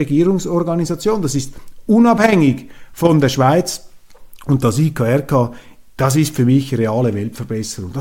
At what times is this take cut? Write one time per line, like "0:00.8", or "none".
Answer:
none